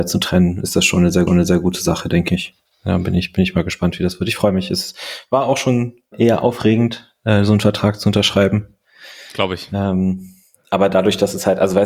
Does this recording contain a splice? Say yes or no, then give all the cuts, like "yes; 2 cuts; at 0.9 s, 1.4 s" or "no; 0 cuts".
yes; 2 cuts; at 1.3 s, 6.1 s